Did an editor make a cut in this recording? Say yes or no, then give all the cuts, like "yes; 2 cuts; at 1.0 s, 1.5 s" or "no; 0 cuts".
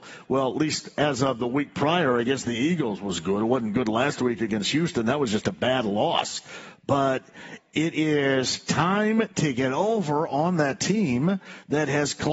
no; 0 cuts